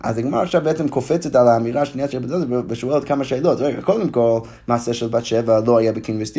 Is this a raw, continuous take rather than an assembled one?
yes; 0 cuts

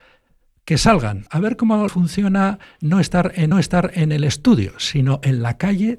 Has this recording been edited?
yes; 3 cuts; at 1.3 s, 1.9 s, 3.5 s

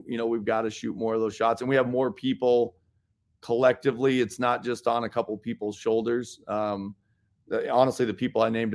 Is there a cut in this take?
no; 0 cuts

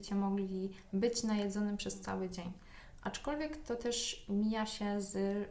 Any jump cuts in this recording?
no; 0 cuts

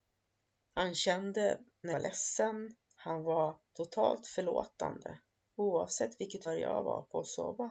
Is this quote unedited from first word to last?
no; 5 cuts; at 1.9 s, 2.8 s, 3.7 s, 5.4 s, 6.4 s

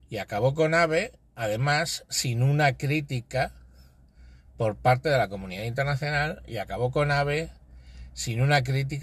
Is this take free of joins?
yes; 0 cuts

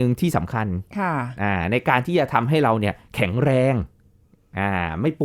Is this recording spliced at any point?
no; 0 cuts

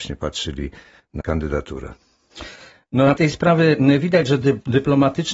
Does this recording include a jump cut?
yes; 2 cuts; at 1.2 s, 3.2 s

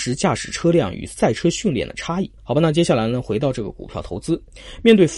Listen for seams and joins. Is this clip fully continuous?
no; 1 cut; at 2.4 s

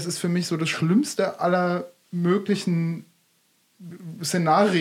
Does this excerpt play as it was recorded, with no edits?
yes; 0 cuts

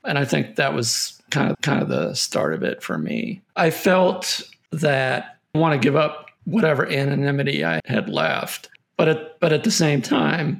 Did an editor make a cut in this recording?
yes; 5 cuts; at 1.5 s, 3.5 s, 5.5 s, 7.8 s, 8.8 s

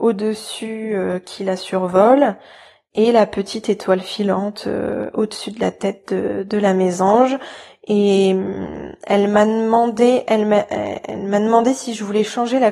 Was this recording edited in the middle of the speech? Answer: no; 0 cuts

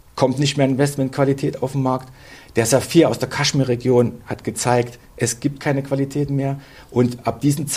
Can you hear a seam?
no; 0 cuts

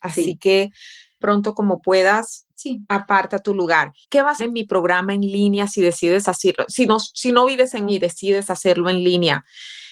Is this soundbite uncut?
no; 5 cuts; at 1.2 s, 2.5 s, 4.0 s, 4.4 s, 7.9 s

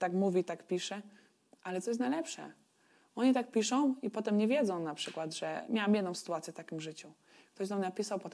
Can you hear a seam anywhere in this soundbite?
no; 0 cuts

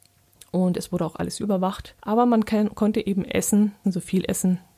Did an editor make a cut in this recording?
yes; 3 cuts; at 1.4 s, 2.0 s, 3.8 s

